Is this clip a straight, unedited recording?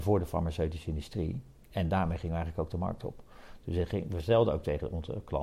yes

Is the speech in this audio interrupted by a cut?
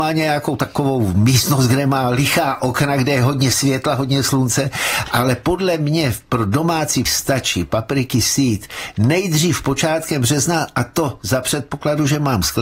yes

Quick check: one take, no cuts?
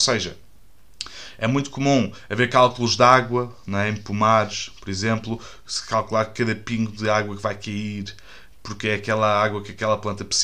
yes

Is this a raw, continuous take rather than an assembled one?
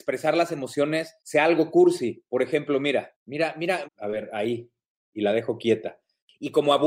no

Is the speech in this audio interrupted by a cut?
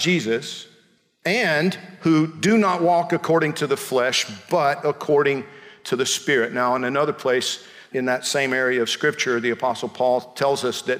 no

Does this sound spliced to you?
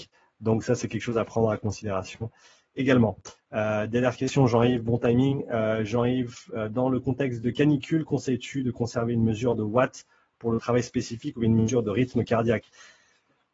no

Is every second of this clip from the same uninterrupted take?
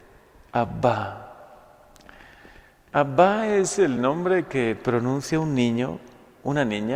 yes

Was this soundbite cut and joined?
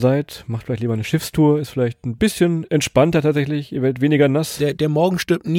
no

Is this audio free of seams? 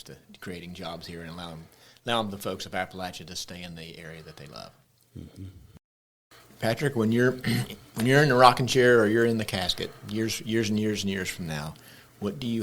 yes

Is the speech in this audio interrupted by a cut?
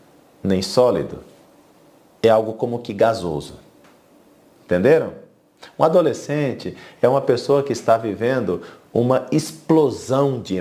no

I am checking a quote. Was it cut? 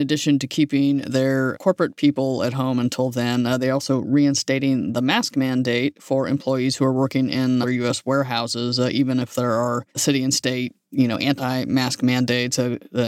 yes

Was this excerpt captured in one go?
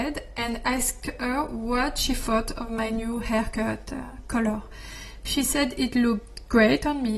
yes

